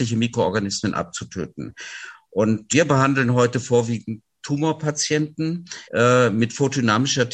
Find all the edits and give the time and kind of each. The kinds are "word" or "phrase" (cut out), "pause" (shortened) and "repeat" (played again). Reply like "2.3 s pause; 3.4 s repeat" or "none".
2.7 s word; 5.8 s pause

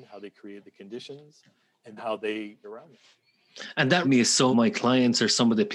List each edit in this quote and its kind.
2.0 s word; 2.6 s word; 4.0 s word; 4.5 s word

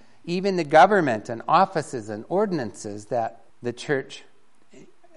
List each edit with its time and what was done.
3.5 s pause

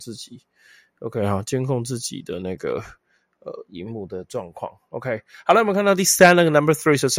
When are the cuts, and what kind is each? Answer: none

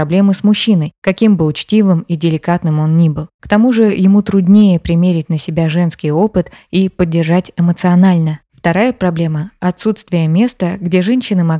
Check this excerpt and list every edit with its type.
none

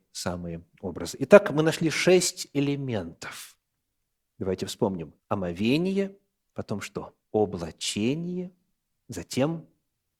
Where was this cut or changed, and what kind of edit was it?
5.2 s pause; 7.2 s pause

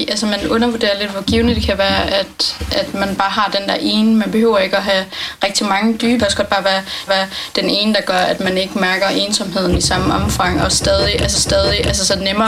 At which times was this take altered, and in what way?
6.2 s phrase; 7.1 s repeat; 11.3 s repeat

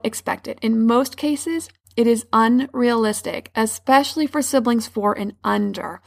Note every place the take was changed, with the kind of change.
none

